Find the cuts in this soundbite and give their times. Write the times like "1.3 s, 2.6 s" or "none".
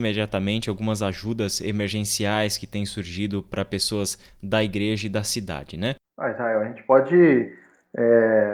none